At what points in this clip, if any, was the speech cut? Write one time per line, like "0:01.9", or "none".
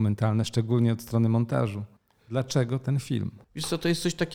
0:02.0
0:03.4